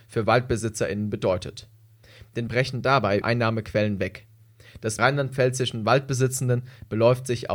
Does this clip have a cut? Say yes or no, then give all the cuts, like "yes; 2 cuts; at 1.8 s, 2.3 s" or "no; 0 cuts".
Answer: yes; 3 cuts; at 2.5 s, 3.2 s, 5.0 s